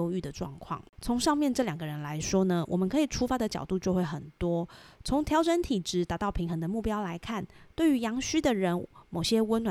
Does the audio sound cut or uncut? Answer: uncut